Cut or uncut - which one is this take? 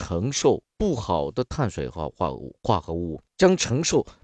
cut